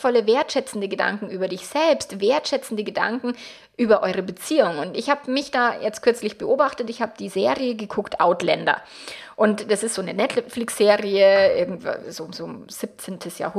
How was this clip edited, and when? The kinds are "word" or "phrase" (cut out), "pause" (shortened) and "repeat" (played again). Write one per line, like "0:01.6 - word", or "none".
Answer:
none